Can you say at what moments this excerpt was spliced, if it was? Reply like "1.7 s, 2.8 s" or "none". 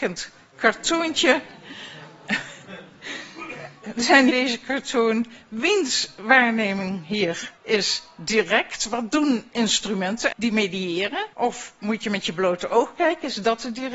4.3 s, 7.6 s, 10.3 s, 11.3 s